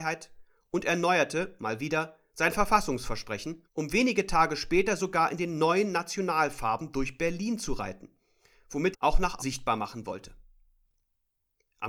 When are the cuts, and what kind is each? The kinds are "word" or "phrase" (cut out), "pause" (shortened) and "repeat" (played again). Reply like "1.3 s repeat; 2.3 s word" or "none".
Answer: 3.7 s pause; 8.9 s phrase; 9.4 s word